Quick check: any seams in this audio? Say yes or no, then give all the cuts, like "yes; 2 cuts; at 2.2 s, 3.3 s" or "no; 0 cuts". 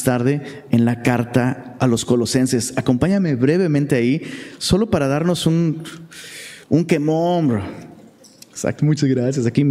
yes; 2 cuts; at 1.8 s, 6.6 s